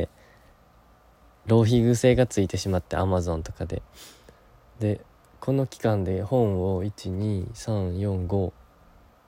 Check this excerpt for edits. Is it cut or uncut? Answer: uncut